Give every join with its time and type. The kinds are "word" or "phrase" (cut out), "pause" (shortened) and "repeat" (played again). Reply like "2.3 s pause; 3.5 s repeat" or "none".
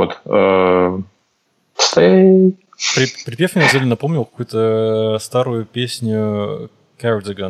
3.7 s word